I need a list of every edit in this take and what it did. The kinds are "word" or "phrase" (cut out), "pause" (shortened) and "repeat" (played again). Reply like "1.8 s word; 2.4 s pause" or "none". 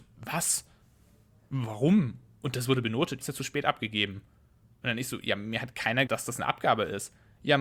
3.2 s phrase; 6.1 s word